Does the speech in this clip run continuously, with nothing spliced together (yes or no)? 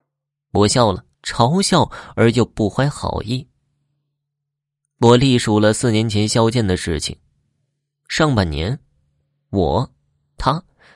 no